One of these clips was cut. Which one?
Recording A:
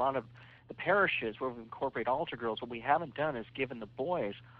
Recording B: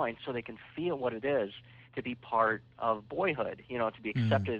B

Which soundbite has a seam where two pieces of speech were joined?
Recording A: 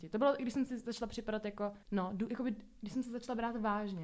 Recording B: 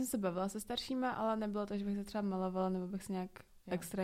A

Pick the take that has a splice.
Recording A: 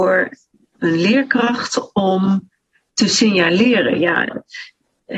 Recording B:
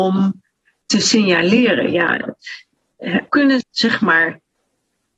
B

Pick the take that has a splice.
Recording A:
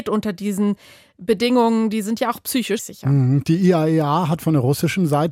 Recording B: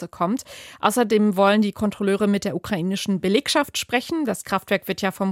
A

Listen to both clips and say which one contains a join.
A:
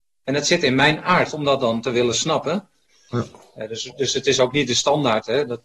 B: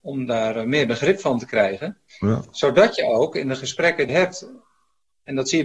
B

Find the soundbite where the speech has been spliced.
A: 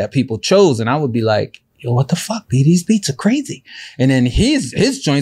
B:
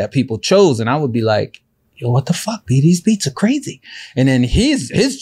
A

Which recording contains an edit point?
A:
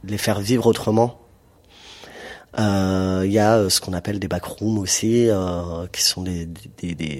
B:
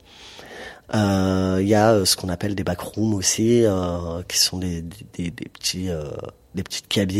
B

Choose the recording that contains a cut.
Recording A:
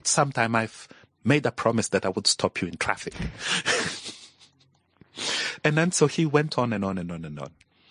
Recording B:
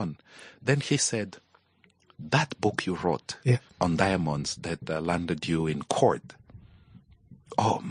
B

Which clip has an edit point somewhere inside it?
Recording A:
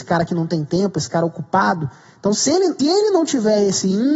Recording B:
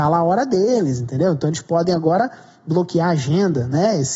A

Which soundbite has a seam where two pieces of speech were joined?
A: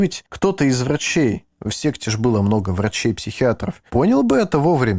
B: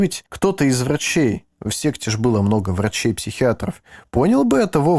A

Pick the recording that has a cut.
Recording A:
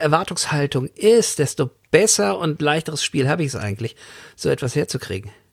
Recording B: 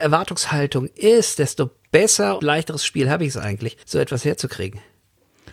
B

